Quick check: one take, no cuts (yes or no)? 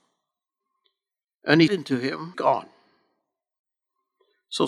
no